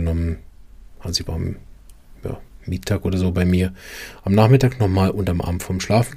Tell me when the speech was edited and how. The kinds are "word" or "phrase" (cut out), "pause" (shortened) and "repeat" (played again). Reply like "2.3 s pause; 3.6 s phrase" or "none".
none